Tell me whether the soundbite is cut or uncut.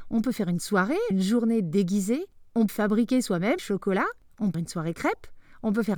cut